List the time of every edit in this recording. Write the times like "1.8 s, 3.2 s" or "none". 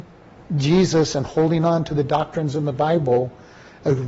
none